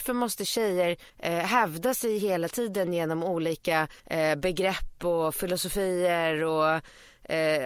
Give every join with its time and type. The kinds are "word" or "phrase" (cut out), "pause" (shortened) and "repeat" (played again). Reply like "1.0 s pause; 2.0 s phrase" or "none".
1.1 s pause; 4.0 s pause